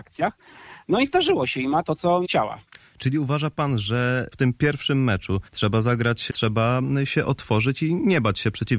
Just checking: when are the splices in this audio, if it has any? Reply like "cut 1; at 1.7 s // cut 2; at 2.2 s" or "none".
cut 1; at 2.2 s // cut 2; at 4.3 s // cut 3; at 5.5 s // cut 4; at 6.3 s